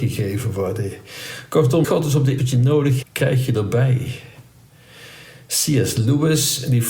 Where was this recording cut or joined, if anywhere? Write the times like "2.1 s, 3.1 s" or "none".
1.8 s, 2.4 s, 3.0 s